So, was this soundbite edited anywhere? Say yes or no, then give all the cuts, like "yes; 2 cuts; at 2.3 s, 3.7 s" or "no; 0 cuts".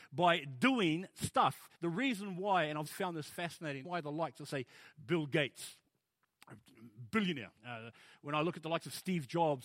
yes; 4 cuts; at 1.7 s, 2.9 s, 3.8 s, 7.6 s